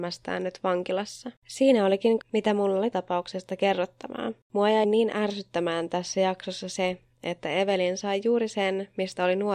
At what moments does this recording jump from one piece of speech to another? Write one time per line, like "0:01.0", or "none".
0:01.4
0:02.2
0:02.9
0:04.4
0:04.8

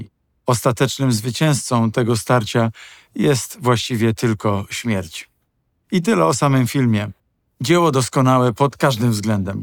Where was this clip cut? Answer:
none

